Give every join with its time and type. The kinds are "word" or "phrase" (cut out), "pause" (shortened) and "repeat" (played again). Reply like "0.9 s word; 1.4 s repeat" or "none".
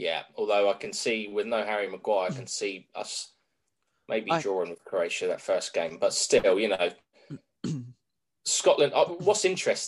none